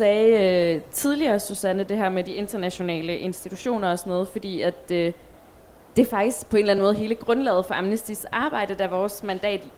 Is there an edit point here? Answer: no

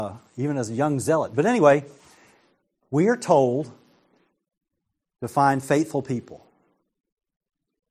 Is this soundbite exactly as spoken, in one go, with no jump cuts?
yes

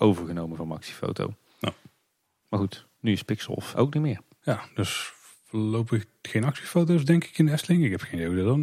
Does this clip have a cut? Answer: yes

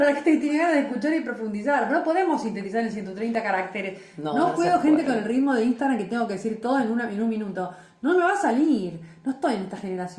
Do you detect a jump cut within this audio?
no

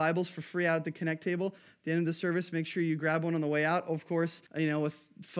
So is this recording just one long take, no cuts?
no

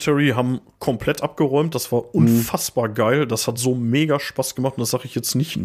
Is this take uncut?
yes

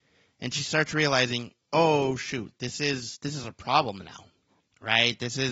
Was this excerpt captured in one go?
yes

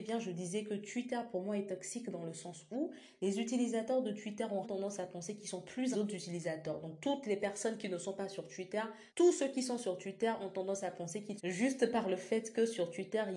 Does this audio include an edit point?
yes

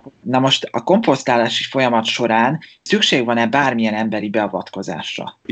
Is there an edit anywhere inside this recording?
no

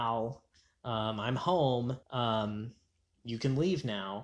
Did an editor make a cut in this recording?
yes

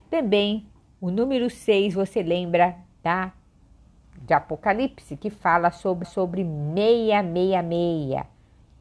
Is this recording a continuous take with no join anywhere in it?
no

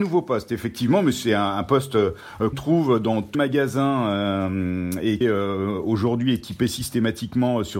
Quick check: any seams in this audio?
yes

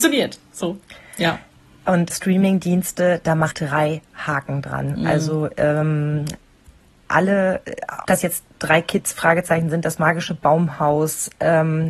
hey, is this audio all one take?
no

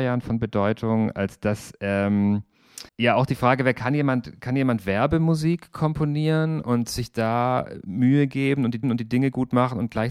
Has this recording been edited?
yes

